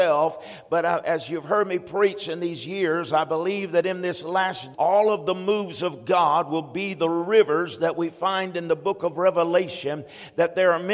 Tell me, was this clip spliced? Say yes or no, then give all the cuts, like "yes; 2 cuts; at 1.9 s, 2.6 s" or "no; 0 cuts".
yes; 1 cut; at 4.7 s